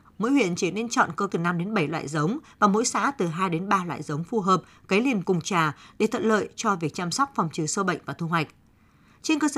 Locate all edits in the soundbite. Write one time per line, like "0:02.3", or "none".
0:01.3
0:05.2